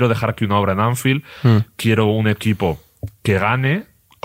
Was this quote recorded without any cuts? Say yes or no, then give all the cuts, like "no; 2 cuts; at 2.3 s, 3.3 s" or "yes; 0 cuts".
yes; 0 cuts